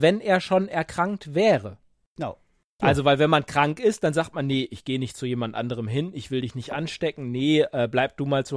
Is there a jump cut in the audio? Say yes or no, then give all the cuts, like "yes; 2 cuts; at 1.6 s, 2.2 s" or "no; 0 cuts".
no; 0 cuts